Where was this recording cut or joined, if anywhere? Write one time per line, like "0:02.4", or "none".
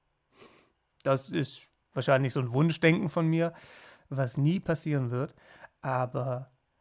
none